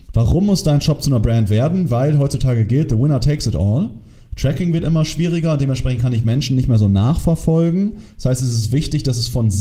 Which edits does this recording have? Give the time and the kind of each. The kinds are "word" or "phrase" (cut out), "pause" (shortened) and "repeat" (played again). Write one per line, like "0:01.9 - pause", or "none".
none